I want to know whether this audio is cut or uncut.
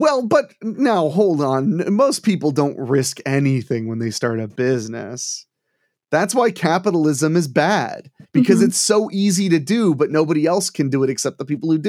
uncut